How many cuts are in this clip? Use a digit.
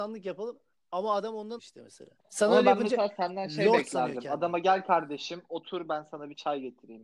2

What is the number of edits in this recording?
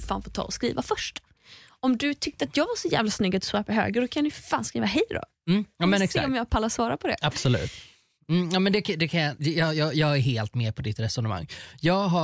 0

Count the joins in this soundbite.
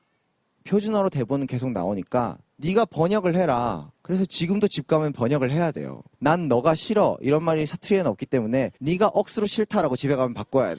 4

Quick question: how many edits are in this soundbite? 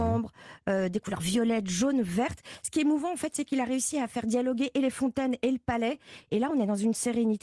0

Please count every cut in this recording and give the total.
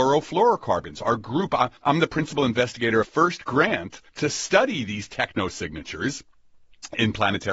3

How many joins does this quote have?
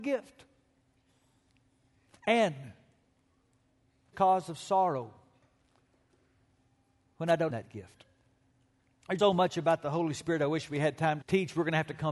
4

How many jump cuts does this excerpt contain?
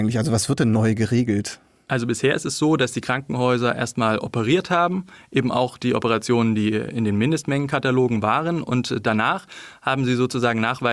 0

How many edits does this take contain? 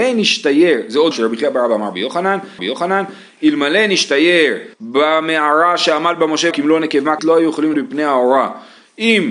6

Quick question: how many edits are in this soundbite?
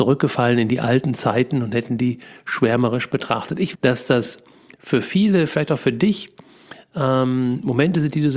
1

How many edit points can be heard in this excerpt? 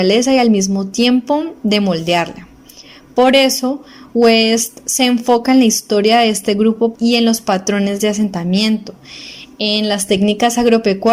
1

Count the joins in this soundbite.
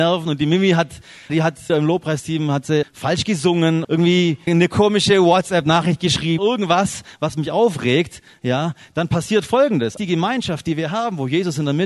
7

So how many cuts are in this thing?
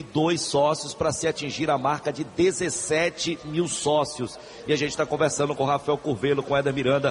0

